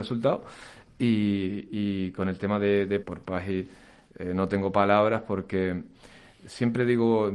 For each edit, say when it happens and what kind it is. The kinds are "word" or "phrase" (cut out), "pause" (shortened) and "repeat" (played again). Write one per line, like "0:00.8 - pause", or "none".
0:03.0 - phrase